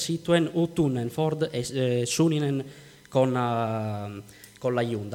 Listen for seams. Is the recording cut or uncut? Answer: uncut